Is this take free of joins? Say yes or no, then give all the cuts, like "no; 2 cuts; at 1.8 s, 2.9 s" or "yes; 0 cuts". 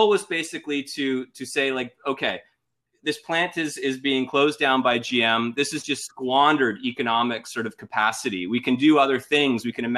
yes; 0 cuts